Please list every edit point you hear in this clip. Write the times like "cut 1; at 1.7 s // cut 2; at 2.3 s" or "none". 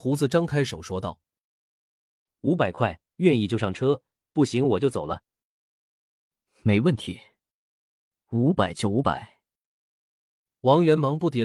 none